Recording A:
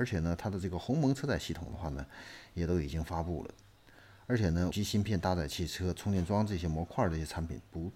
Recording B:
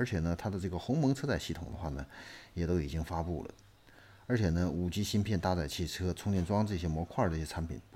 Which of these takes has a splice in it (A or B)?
A